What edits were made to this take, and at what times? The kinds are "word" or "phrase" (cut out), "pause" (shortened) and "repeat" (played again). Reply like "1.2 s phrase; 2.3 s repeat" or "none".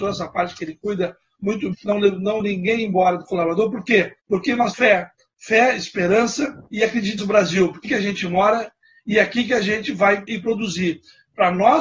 1.7 s word; 2.4 s word; 4.2 s pause; 4.7 s word; 6.7 s pause; 7.2 s word; 7.8 s phrase; 10.3 s word

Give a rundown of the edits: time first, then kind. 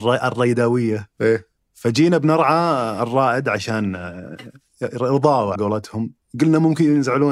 1.6 s pause; 5.6 s word

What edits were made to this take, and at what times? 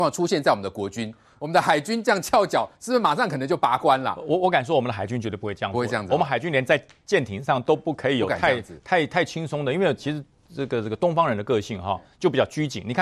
none

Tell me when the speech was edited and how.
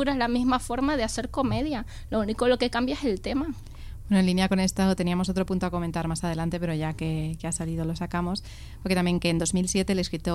none

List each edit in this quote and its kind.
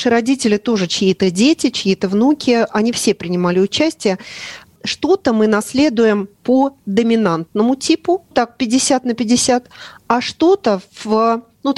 8.3 s word

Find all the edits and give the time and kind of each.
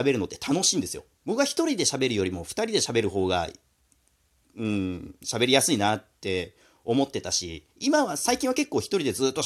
1.1 s pause; 7.7 s pause

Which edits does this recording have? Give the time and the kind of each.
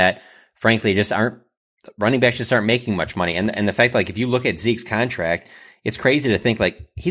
none

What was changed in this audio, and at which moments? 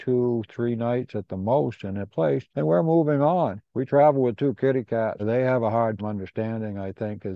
2.1 s word; 2.5 s pause; 3.7 s pause; 5.2 s word; 6.0 s word

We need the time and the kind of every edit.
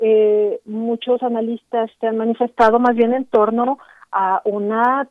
none

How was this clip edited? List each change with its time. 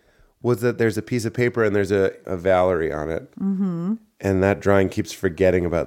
2.2 s word

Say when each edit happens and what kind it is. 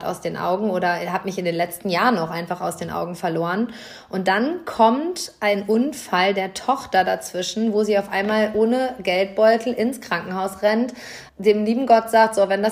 11.3 s pause

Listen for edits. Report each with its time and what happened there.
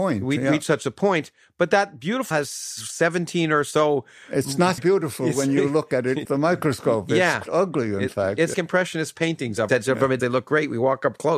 2.3 s word; 4.8 s word; 6.2 s word; 7.5 s word; 8.5 s word; 9.7 s word; 10.2 s word

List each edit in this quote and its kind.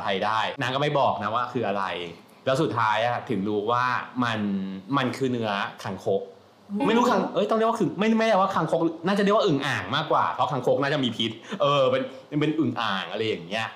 6.8 s word

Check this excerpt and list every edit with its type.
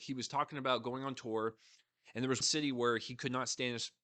2.4 s word

